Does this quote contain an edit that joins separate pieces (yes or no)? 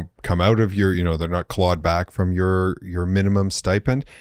no